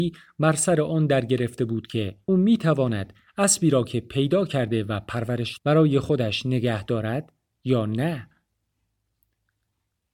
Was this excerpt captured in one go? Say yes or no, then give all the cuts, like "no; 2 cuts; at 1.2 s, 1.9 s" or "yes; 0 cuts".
no; 2 cuts; at 2.3 s, 5.6 s